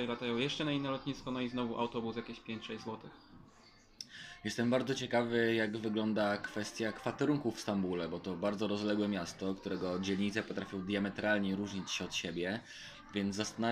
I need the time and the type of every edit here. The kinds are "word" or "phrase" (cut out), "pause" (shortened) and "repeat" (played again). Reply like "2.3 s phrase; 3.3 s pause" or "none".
none